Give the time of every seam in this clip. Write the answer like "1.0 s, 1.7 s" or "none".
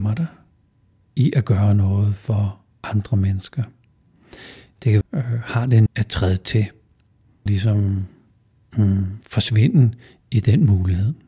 5.0 s, 5.9 s, 7.5 s

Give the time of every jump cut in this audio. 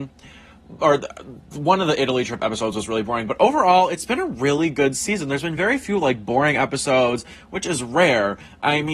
none

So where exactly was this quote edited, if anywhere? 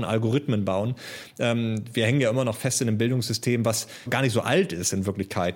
4.1 s

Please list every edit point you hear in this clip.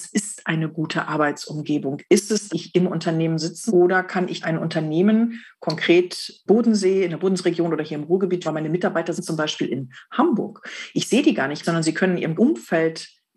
2.5 s, 3.7 s, 4.4 s, 6.5 s, 8.4 s, 9.2 s, 11.6 s, 12.4 s

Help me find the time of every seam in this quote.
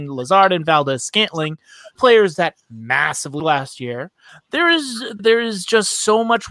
2.0 s, 3.4 s, 5.2 s

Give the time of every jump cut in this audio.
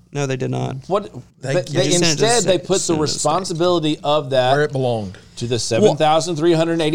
1.3 s

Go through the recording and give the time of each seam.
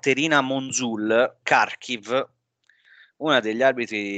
1.4 s

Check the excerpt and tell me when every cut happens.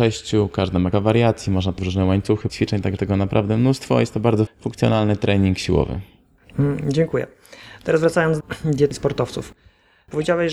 0.9 s, 1.8 s, 2.5 s, 3.0 s, 4.5 s, 8.4 s, 8.9 s

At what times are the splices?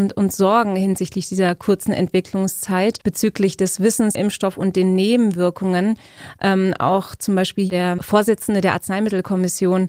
3.0 s, 4.1 s

